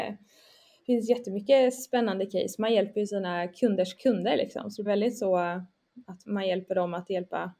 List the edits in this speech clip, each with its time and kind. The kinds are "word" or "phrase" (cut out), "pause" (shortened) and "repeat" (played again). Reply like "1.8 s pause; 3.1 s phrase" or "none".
4.9 s word; 6.2 s word